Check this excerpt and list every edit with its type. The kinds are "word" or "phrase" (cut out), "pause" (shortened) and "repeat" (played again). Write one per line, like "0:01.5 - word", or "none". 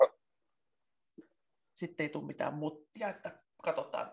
none